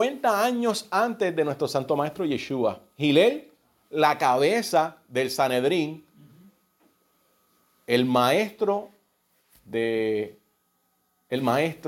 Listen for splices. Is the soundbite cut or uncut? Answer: uncut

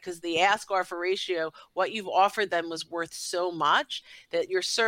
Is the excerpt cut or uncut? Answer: uncut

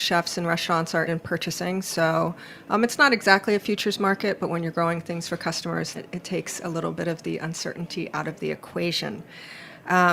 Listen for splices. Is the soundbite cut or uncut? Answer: cut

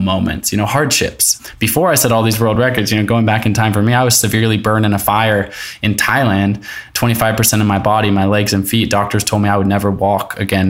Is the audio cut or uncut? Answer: uncut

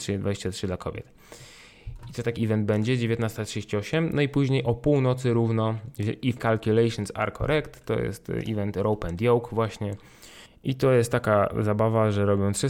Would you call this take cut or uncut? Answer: cut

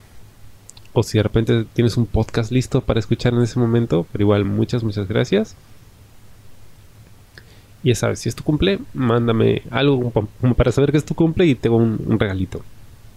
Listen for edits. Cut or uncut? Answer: uncut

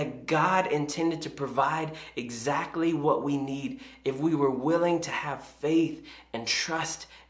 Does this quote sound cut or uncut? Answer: uncut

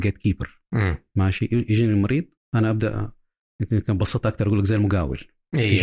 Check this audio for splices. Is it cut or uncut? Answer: cut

